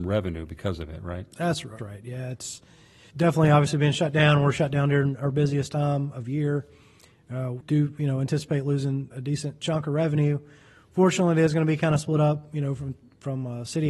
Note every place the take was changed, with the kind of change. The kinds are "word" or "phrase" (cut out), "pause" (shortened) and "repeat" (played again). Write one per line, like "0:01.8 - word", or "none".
0:01.8 - word
0:03.1 - word
0:07.6 - word
0:09.1 - word